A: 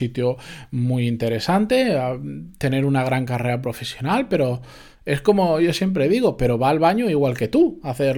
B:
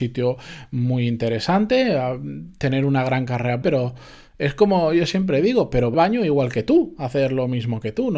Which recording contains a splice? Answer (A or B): B